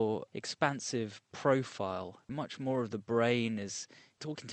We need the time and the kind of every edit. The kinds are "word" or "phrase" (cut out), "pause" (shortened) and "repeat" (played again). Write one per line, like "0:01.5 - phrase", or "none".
0:02.2 - pause

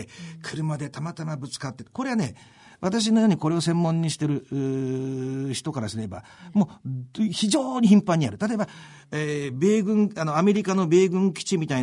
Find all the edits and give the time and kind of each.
none

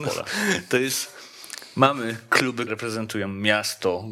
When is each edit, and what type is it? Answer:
0:02.7 - word

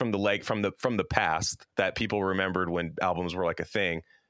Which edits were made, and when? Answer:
0:01.7 - pause

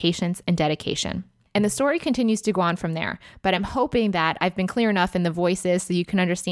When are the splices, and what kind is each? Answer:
none

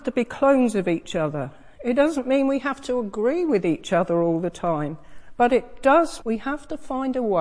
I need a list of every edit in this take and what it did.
0:01.7 - pause
0:06.2 - word

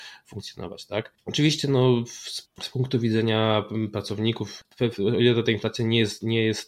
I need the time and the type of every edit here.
none

